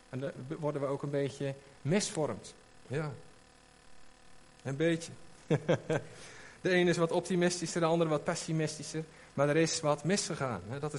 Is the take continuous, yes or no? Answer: yes